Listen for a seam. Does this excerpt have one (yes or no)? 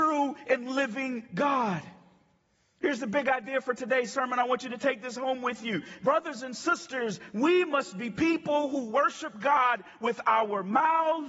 no